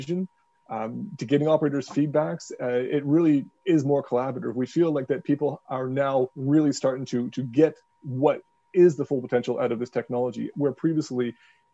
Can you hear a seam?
no; 0 cuts

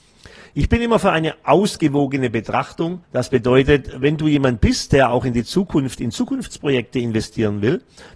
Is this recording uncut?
no; 1 cut; at 3.0 s

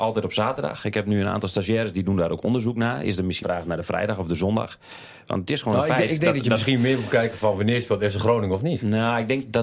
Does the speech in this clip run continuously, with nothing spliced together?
no; 1 cut; at 3.4 s

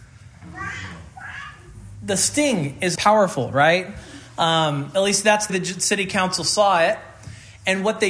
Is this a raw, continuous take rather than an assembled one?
no; 2 cuts; at 2.9 s, 5.5 s

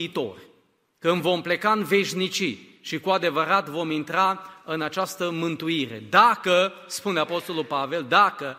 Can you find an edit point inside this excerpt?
no; 0 cuts

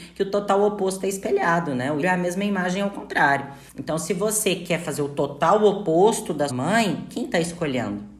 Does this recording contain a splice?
yes; 3 cuts; at 2.0 s, 3.7 s, 6.5 s

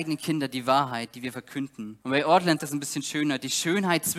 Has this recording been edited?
yes; 2 cuts; at 2.0 s, 2.6 s

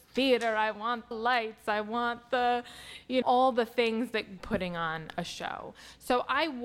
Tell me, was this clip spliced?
yes; 3 cuts; at 1.1 s, 3.2 s, 4.4 s

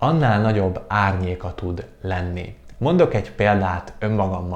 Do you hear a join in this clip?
no; 0 cuts

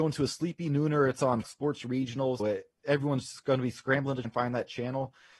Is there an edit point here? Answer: yes; 3 cuts; at 1.4 s, 2.4 s, 4.2 s

